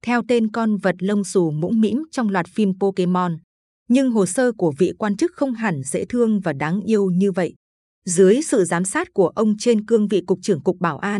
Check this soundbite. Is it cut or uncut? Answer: uncut